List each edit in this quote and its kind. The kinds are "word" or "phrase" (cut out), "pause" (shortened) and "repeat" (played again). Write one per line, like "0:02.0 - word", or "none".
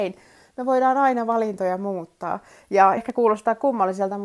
0:03.0 - phrase